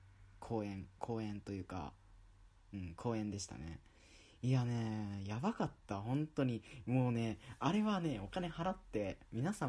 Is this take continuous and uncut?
yes; 0 cuts

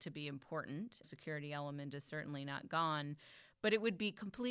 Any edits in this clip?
yes; 1 cut; at 1.0 s

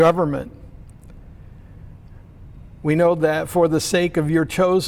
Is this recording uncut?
yes; 0 cuts

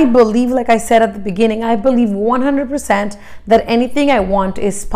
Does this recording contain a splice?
no; 0 cuts

